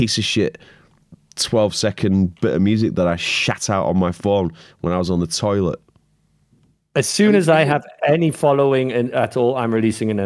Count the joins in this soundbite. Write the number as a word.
zero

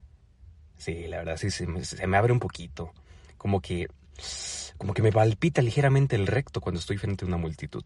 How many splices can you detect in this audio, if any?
zero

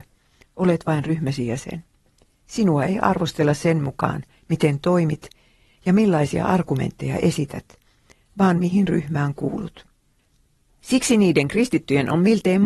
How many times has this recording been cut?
zero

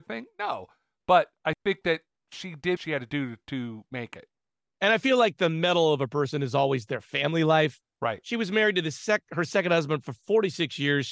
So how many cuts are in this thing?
one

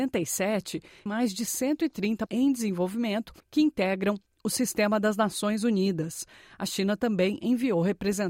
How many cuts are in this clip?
three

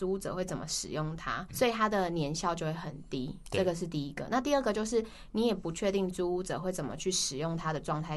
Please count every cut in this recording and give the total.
one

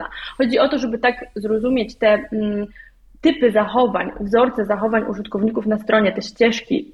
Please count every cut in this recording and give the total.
one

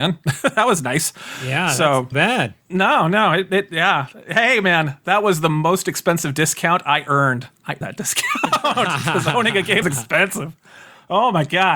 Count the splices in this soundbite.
four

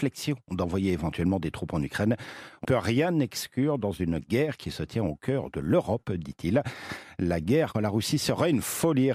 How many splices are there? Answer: two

